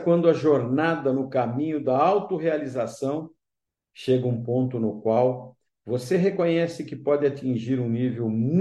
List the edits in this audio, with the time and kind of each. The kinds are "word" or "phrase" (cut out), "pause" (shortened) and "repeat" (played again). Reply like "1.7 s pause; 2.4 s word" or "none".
none